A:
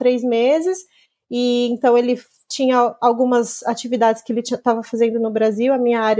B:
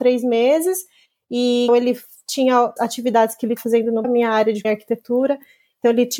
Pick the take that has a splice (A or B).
B